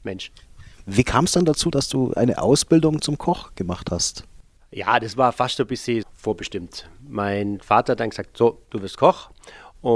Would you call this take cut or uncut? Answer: cut